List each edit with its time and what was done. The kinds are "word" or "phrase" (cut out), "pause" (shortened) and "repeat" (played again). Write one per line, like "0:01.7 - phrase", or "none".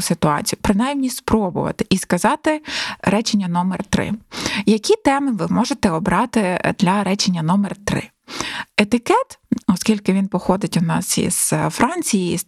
none